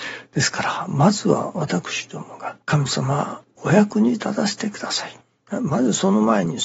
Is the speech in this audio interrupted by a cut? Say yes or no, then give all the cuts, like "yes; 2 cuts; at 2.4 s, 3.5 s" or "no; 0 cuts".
yes; 1 cut; at 2.6 s